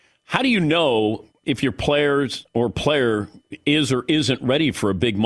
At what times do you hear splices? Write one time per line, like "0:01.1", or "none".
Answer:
0:01.3